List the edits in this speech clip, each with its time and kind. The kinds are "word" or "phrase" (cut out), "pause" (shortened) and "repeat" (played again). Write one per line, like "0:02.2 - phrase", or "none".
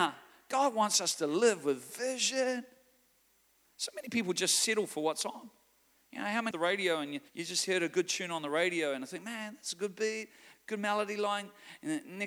0:06.5 - phrase
0:07.3 - pause